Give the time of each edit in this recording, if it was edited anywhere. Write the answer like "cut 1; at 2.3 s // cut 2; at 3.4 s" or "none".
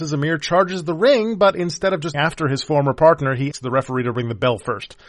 cut 1; at 2.1 s // cut 2; at 3.5 s